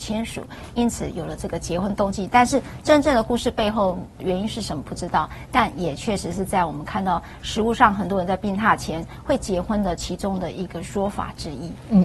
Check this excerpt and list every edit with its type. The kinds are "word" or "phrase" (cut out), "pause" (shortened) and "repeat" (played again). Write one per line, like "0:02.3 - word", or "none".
0:04.2 - word